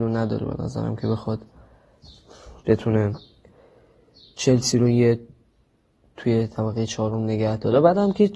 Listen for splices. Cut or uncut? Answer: uncut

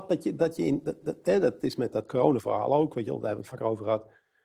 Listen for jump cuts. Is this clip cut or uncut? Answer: cut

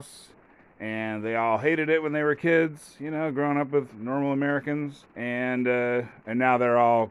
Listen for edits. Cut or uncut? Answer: cut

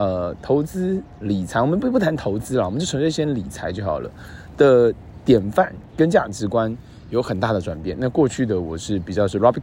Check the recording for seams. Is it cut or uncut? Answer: cut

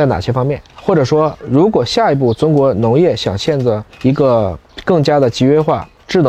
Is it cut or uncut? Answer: uncut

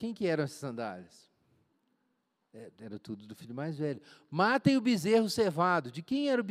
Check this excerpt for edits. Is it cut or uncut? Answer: uncut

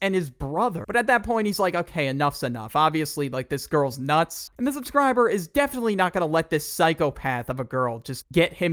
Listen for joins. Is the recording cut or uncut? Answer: uncut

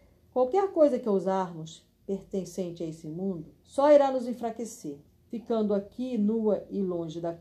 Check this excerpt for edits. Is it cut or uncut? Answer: cut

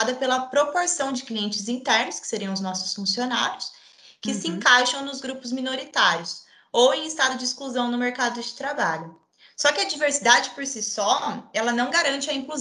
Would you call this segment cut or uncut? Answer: uncut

